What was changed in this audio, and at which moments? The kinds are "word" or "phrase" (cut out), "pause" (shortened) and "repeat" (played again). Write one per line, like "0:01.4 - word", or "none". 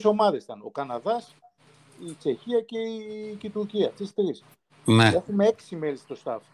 none